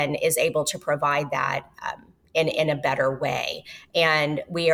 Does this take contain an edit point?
no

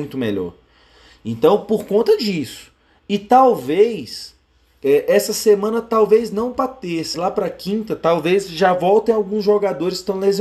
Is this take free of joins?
no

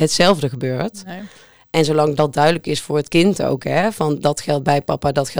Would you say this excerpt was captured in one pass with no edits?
yes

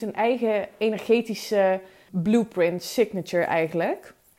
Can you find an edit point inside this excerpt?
yes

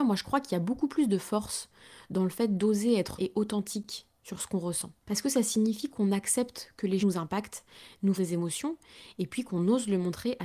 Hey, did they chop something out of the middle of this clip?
yes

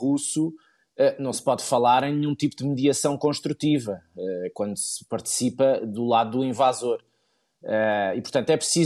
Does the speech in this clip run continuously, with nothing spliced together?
yes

